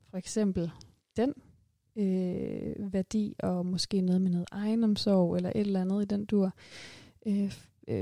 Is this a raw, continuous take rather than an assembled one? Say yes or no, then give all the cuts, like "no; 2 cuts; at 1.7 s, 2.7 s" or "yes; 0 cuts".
yes; 0 cuts